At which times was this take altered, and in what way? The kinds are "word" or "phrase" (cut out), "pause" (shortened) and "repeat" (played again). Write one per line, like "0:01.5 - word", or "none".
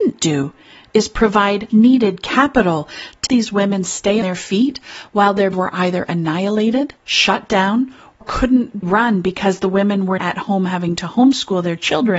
0:01.7 - word
0:03.3 - word
0:04.2 - word
0:05.5 - word
0:08.2 - word
0:08.8 - word
0:10.2 - word